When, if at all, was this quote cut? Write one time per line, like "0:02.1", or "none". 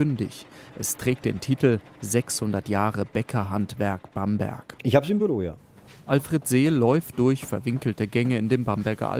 none